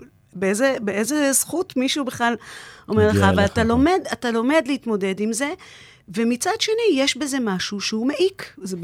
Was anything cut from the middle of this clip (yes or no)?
no